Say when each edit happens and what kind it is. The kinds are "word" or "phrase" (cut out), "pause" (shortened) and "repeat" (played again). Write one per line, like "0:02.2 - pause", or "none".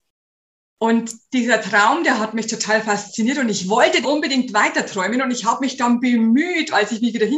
0:04.0 - word